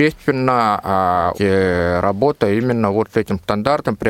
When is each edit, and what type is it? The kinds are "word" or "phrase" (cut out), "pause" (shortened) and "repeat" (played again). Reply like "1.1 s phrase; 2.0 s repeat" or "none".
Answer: 1.3 s word